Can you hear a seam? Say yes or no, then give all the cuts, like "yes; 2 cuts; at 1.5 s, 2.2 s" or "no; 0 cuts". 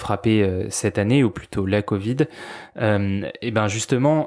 no; 0 cuts